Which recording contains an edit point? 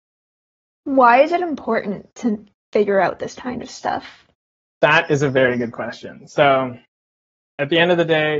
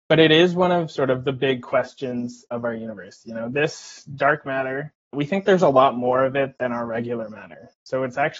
second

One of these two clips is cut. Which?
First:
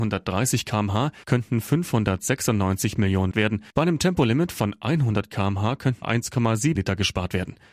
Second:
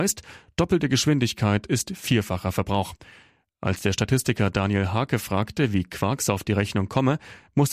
first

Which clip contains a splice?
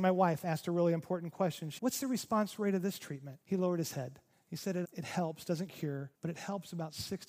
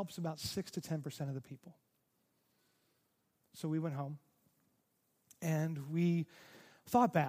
first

